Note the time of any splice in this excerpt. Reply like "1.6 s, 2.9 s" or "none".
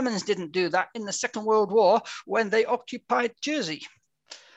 none

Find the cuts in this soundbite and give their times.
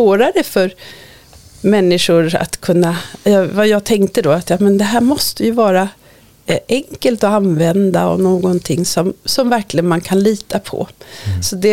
none

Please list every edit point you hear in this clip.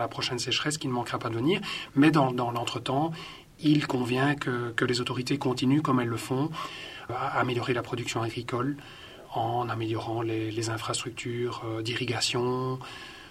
none

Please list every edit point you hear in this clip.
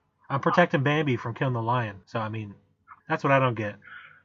2.0 s, 3.0 s

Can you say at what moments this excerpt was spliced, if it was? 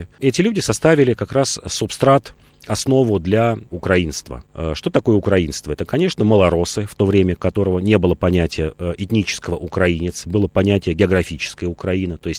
3.7 s

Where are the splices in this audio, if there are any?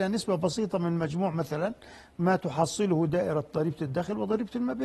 none

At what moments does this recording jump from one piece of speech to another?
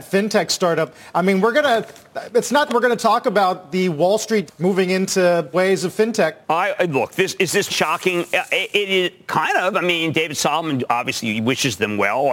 2.7 s, 4.5 s, 5.5 s, 6.4 s, 7.7 s

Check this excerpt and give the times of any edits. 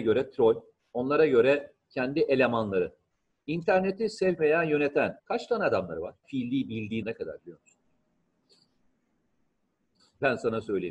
4.4 s, 5.2 s, 6.2 s, 7.0 s

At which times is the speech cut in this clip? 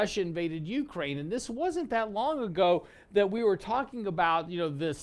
none

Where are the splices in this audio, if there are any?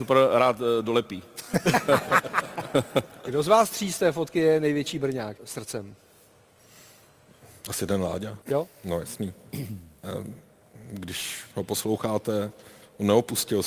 5.4 s, 8.4 s

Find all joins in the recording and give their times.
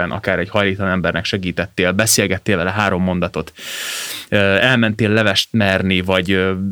none

